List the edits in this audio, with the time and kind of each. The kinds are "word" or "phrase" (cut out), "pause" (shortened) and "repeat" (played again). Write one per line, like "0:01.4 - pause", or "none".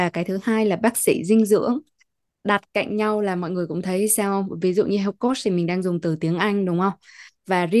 none